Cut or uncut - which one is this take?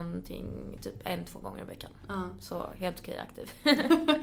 uncut